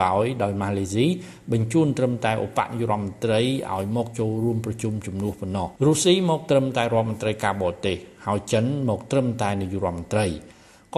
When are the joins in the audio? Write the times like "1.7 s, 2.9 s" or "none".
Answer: 5.8 s

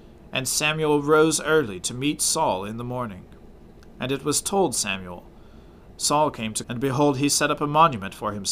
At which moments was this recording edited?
6.6 s

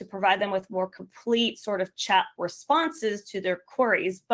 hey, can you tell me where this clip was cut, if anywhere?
2.4 s

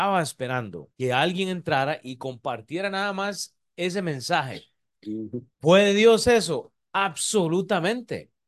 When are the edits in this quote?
0.9 s, 5.5 s

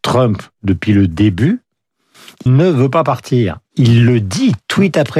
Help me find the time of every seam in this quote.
2.5 s, 3.7 s

